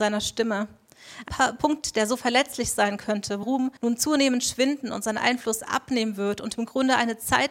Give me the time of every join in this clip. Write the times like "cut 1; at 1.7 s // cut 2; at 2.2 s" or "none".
cut 1; at 1.3 s // cut 2; at 3.4 s // cut 3; at 3.8 s